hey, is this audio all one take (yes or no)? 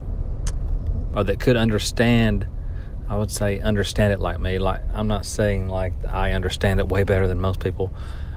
no